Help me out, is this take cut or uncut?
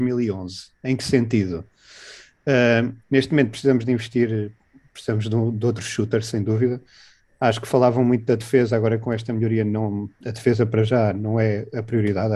cut